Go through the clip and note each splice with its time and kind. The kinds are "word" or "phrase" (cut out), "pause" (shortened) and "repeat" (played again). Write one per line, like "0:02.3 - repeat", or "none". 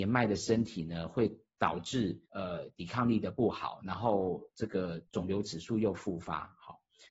0:02.3 - pause
0:05.1 - pause